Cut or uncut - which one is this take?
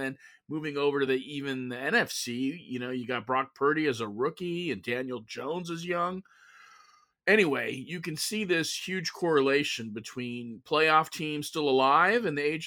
uncut